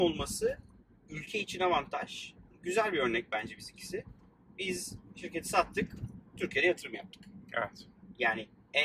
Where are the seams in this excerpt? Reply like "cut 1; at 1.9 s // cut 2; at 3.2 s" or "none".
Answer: none